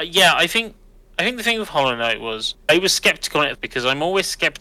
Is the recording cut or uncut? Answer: cut